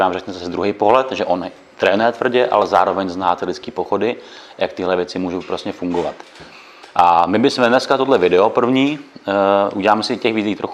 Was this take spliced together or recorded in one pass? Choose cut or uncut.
uncut